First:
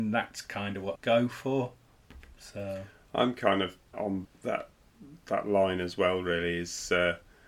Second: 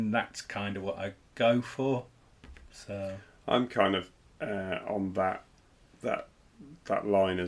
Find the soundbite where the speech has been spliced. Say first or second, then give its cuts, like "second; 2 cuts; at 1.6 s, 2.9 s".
first; 3 cuts; at 1.0 s, 3.9 s, 4.2 s